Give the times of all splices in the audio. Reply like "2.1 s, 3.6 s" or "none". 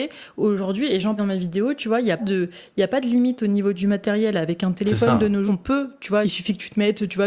1.2 s, 2.2 s, 5.5 s, 6.2 s